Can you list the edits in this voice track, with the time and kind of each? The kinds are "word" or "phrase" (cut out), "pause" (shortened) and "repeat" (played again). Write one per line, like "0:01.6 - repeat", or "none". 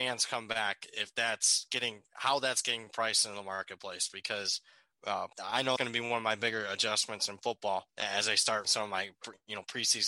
0:05.3 - pause
0:05.8 - word
0:07.9 - pause
0:08.6 - word